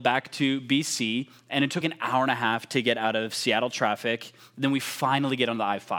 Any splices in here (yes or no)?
yes